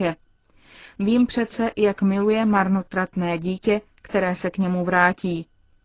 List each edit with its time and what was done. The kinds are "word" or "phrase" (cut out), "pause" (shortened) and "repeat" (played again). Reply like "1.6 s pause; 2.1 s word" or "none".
none